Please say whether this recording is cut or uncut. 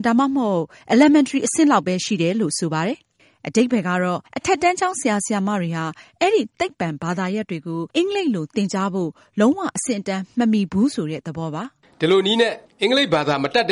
cut